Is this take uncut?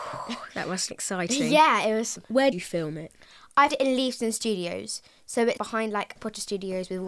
no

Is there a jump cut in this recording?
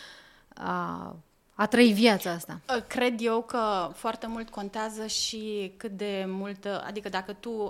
yes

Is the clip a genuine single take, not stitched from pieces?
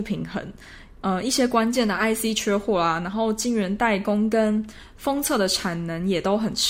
yes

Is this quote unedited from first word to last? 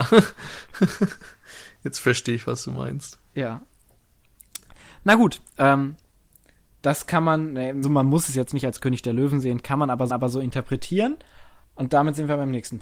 no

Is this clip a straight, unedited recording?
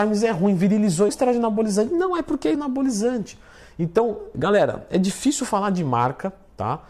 no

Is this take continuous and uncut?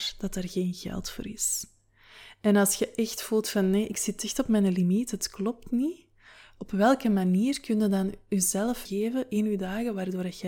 no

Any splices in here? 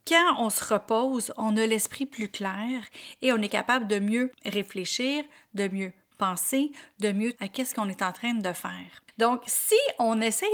yes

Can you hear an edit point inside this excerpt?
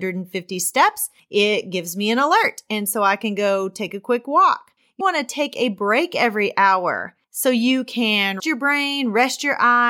yes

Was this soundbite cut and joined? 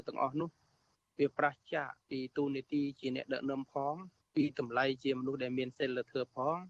yes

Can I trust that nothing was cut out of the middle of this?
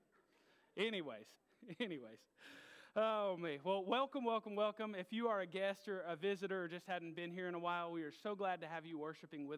no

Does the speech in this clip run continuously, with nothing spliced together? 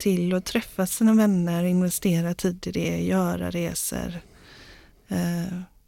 yes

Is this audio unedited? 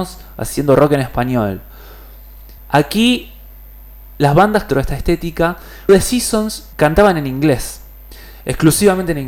no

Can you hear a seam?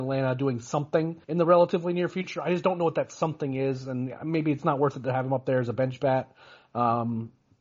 yes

